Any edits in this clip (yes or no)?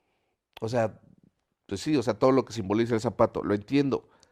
no